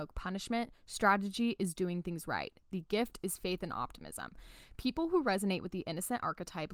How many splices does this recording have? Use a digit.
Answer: 0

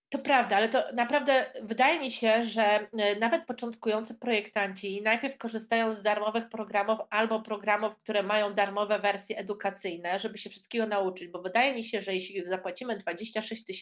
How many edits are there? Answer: 0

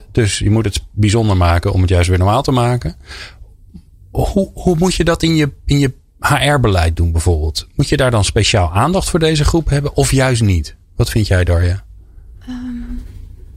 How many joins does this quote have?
0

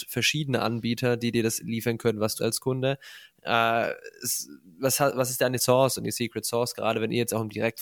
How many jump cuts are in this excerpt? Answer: 2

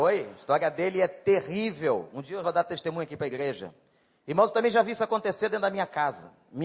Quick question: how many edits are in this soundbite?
1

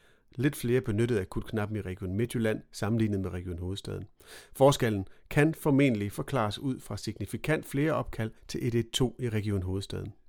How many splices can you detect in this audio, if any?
1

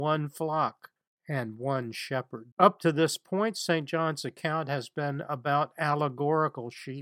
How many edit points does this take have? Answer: 2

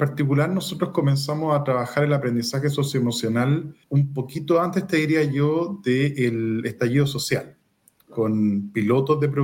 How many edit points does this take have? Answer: 1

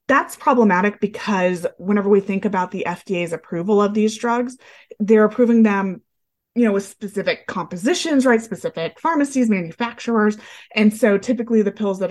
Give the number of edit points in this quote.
0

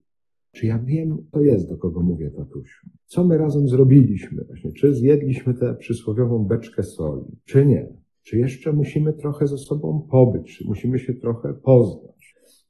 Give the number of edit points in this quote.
3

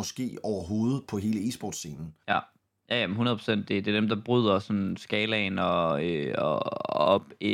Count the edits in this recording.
1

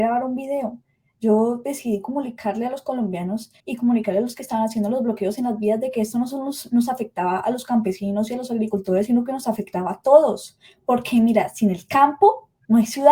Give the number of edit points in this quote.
1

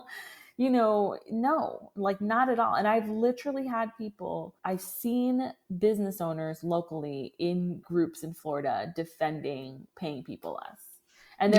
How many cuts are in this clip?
3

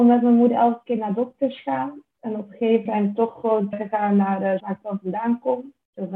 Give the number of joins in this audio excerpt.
3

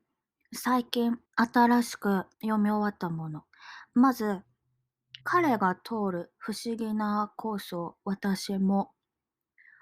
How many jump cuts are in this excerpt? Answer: 3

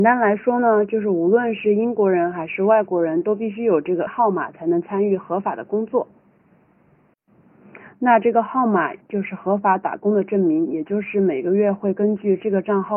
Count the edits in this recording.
1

